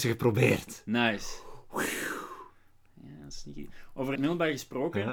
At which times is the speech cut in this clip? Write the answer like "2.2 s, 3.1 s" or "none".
4.1 s

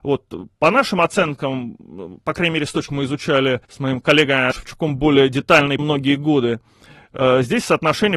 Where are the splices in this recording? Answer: 2.9 s, 3.6 s, 4.5 s, 5.8 s

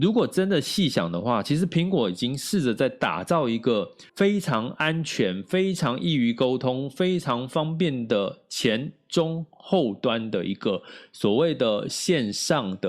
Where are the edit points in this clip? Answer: 4.1 s

